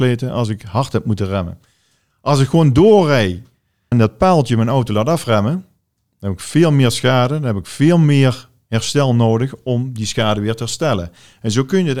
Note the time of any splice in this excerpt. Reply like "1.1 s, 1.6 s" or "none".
3.9 s